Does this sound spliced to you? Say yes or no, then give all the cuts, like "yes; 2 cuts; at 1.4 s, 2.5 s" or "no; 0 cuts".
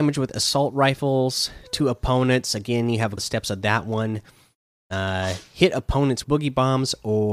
yes; 2 cuts; at 3.2 s, 6.2 s